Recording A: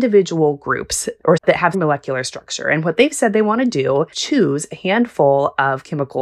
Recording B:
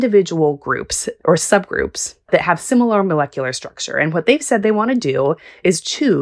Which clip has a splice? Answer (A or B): A